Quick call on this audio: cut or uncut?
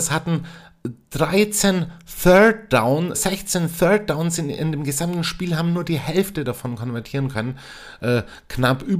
cut